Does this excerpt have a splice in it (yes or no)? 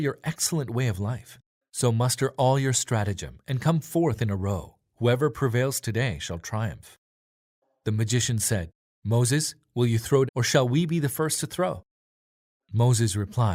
yes